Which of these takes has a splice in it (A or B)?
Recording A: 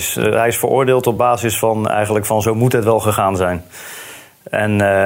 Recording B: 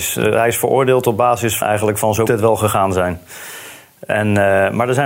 B